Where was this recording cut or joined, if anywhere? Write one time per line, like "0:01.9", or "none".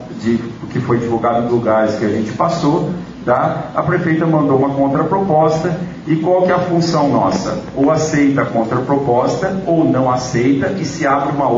0:01.5